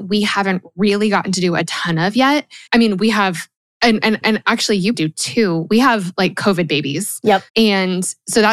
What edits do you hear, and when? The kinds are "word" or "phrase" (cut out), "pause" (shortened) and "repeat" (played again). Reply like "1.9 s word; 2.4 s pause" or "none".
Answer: 2.7 s pause; 4.2 s repeat; 4.9 s word; 7.5 s pause